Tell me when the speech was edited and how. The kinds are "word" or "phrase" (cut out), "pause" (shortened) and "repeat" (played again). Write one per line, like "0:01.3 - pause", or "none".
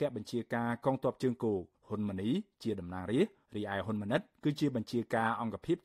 0:01.7 - pause
0:03.4 - pause